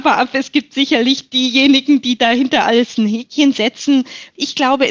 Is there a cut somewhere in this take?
no; 0 cuts

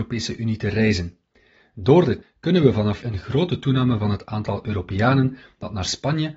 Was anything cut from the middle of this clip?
yes; 3 cuts; at 2.2 s, 3.0 s, 4.0 s

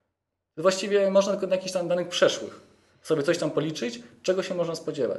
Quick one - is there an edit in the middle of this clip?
no; 0 cuts

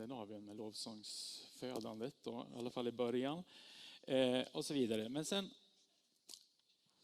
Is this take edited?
no; 0 cuts

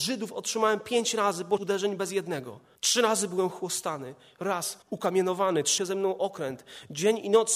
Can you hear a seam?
yes; 4 cuts; at 1.6 s, 2.8 s, 4.8 s, 5.8 s

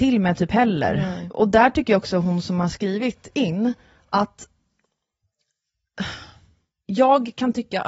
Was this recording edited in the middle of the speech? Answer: no; 0 cuts

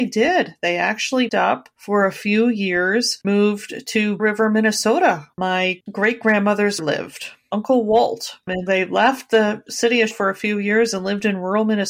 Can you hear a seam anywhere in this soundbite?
yes; 8 cuts; at 1.3 s, 3.2 s, 4.2 s, 5.3 s, 6.8 s, 8.7 s, 9.7 s, 10.1 s

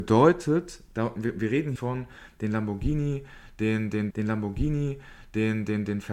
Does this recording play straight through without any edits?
no; 2 cuts; at 1.8 s, 4.1 s

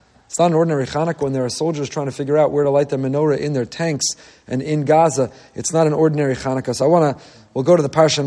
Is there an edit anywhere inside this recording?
no; 0 cuts

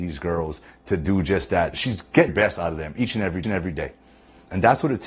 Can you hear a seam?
yes; 3 cuts; at 1.7 s, 2.3 s, 3.4 s

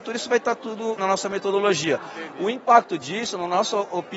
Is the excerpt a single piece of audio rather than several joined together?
no; 1 cut; at 1.0 s

